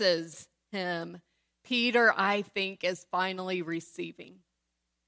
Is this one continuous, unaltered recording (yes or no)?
yes